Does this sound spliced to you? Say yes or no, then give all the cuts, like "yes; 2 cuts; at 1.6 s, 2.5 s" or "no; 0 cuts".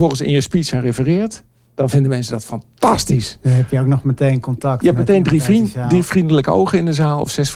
no; 0 cuts